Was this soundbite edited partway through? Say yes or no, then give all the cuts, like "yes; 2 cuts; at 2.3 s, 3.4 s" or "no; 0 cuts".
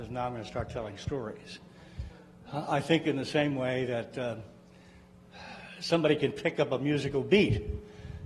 no; 0 cuts